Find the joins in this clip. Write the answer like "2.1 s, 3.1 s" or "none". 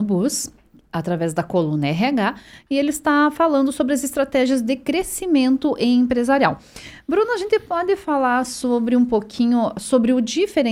none